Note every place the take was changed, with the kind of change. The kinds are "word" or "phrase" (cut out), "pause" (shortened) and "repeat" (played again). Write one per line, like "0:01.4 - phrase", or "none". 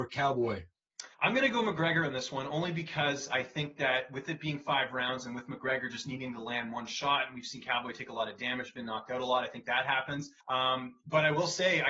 0:01.1 - pause
0:10.4 - pause